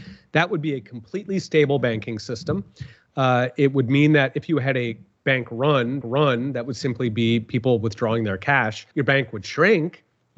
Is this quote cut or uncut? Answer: cut